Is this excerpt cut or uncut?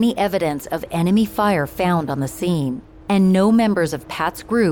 uncut